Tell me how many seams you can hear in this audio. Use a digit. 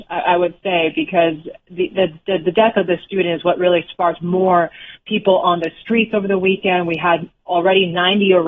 0